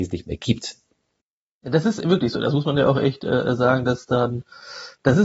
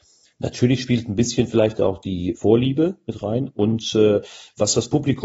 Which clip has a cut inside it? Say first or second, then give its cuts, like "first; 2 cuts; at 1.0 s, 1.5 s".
second; 1 cut; at 2.3 s